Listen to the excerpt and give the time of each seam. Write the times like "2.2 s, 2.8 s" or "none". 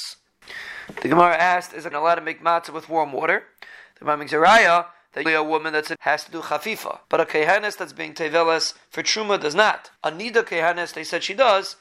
1.9 s, 5.3 s, 6.0 s, 7.0 s, 10.0 s